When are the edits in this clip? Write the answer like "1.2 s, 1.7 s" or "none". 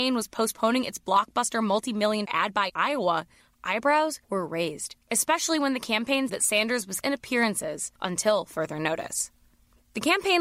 2.2 s, 2.7 s, 4.2 s, 5.0 s, 6.3 s, 7.0 s, 8.0 s